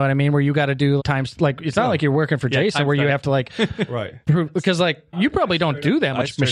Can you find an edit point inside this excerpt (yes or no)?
yes